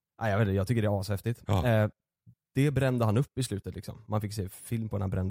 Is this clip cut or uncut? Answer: uncut